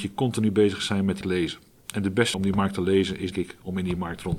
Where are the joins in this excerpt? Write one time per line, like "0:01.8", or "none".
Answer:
0:01.2
0:02.3
0:03.3